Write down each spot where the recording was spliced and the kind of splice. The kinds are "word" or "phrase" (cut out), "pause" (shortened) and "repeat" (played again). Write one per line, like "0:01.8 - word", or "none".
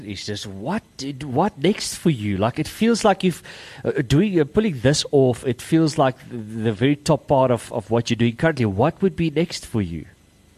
0:07.7 - word